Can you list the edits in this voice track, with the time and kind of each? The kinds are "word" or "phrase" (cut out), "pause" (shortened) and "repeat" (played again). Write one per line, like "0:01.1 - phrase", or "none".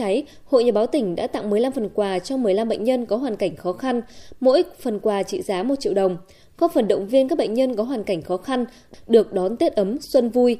none